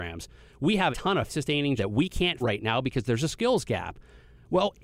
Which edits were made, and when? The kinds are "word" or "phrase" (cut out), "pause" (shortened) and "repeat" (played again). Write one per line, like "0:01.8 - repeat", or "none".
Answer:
0:00.9 - word
0:01.3 - word
0:01.8 - word
0:02.4 - word